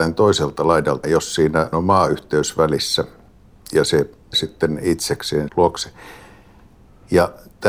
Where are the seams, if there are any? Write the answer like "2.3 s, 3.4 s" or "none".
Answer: 1.0 s, 1.7 s, 4.3 s, 5.5 s